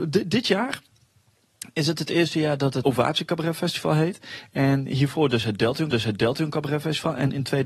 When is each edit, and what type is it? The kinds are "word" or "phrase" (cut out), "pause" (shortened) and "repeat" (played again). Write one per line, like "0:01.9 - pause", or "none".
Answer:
0:02.8 - word
0:05.9 - repeat